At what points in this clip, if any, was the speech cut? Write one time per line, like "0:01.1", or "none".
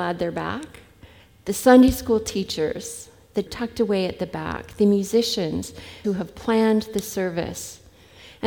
0:01.2
0:03.5
0:06.0